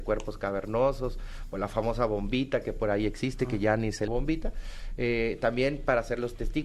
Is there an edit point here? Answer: yes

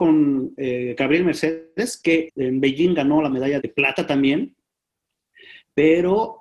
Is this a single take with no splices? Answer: no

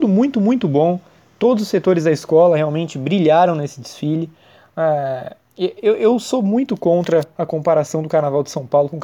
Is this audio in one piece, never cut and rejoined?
yes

